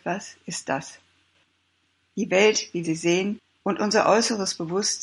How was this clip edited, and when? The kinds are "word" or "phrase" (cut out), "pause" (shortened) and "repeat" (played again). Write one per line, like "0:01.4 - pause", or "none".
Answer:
0:02.8 - word